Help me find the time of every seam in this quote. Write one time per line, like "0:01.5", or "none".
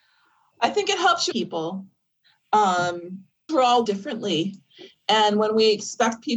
0:01.3
0:03.5
0:03.9